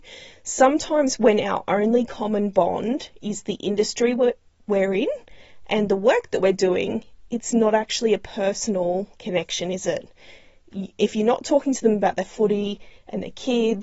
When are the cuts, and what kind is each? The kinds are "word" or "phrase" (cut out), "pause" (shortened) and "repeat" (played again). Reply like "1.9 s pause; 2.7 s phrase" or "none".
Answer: 9.1 s pause